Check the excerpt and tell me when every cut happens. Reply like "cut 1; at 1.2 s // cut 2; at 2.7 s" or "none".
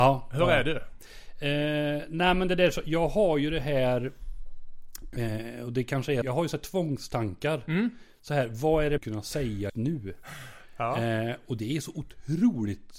cut 1; at 6.2 s // cut 2; at 9.0 s // cut 3; at 9.7 s

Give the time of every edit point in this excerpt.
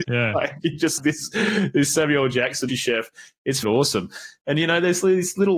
cut 1; at 1.0 s // cut 2; at 2.7 s // cut 3; at 3.6 s

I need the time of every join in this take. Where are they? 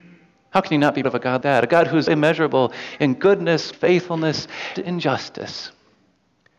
cut 1; at 1.0 s // cut 2; at 1.4 s // cut 3; at 2.1 s // cut 4; at 3.7 s // cut 5; at 4.8 s

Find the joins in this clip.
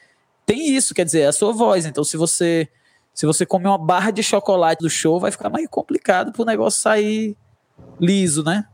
cut 1; at 4.8 s

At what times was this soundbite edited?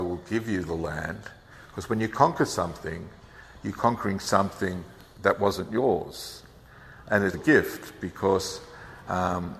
cut 1; at 7.3 s

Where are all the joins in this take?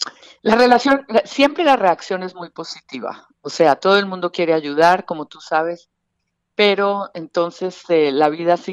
none

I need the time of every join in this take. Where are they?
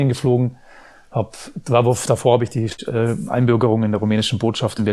none

